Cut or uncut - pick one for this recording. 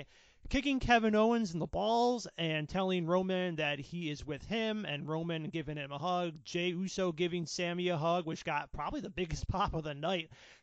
uncut